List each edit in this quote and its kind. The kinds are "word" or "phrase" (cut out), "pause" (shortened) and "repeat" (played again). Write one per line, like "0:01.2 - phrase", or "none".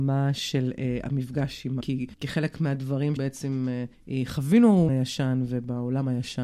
0:01.8 - word
0:02.1 - pause
0:03.2 - word
0:03.9 - pause
0:04.9 - phrase

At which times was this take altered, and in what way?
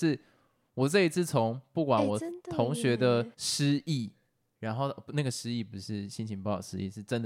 0:03.3 - pause

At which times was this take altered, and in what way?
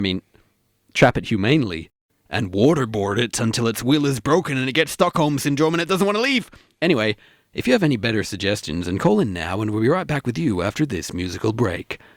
none

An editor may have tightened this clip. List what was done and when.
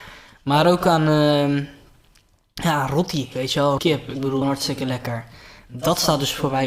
0:03.8 - word
0:04.4 - phrase

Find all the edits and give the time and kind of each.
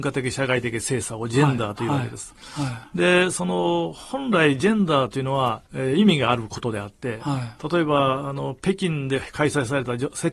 0:05.7 - pause

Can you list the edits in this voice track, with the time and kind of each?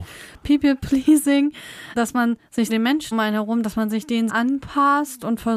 0:02.0 - word
0:02.7 - word
0:03.1 - word
0:04.3 - word

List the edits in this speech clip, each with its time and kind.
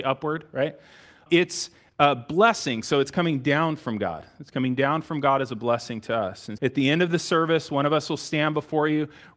0:06.6 - word

